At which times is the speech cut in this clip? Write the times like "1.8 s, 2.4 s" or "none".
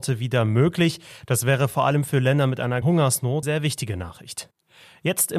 2.8 s, 3.4 s